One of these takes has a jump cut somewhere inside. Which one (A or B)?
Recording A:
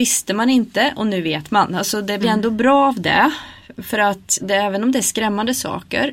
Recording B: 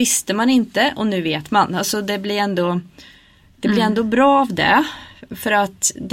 A